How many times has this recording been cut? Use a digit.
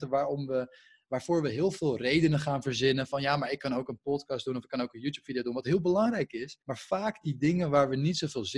1